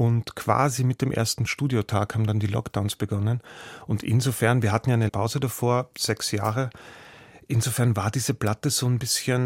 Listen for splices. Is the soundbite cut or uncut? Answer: cut